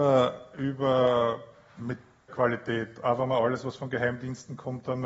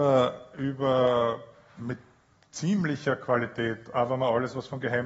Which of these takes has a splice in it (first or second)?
first